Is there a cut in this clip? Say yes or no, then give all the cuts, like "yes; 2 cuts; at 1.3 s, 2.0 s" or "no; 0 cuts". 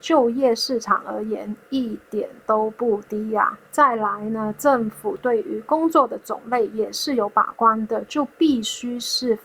yes; 1 cut; at 3.7 s